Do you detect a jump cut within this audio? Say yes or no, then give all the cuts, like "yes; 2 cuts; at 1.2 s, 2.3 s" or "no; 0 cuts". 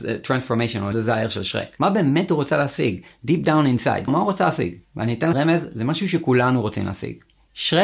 yes; 3 cuts; at 0.9 s, 4.1 s, 5.3 s